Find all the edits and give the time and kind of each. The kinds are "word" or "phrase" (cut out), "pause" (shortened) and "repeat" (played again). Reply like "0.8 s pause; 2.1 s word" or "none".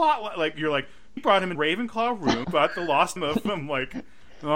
1.2 s word; 1.5 s word; 2.4 s word; 3.2 s word